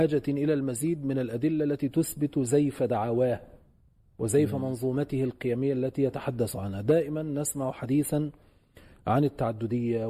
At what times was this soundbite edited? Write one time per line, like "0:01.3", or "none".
none

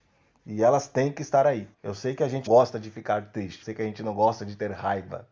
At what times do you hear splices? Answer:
0:01.7
0:02.5
0:03.6

